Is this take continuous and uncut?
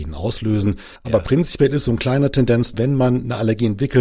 no; 2 cuts; at 1.0 s, 2.7 s

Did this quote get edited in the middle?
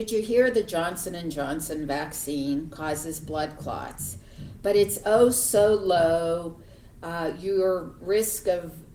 no; 0 cuts

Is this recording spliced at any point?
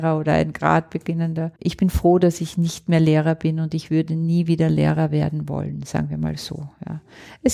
yes; 1 cut; at 1.6 s

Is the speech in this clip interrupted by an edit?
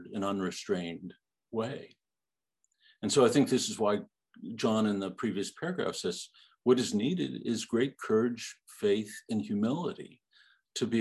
no; 0 cuts

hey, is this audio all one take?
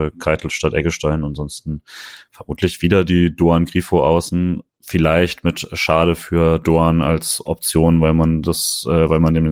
no; 1 cut; at 4.7 s

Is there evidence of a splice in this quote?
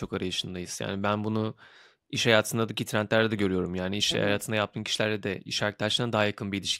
no; 0 cuts

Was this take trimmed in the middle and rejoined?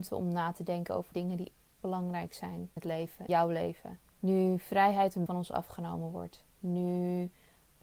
yes; 7 cuts; at 1.1 s, 1.8 s, 2.8 s, 3.3 s, 4.1 s, 5.3 s, 6.5 s

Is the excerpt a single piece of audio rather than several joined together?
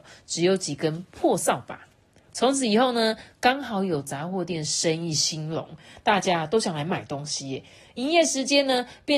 yes; 0 cuts

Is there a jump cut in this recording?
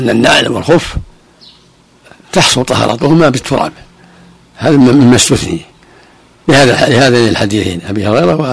no; 0 cuts

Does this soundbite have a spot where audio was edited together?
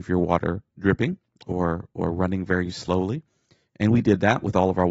no; 0 cuts

